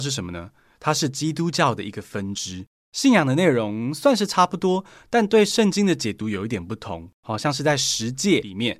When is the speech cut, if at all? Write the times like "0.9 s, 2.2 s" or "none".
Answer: none